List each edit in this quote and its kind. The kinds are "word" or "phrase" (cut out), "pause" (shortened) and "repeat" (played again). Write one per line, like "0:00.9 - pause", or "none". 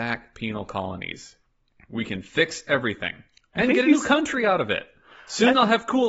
none